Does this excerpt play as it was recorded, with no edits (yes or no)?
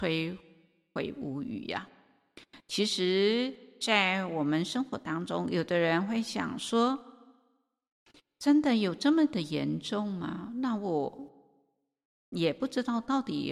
yes